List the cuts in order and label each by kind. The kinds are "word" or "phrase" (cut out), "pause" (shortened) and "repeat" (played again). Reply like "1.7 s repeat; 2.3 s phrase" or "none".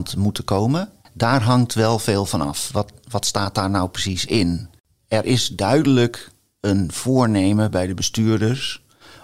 none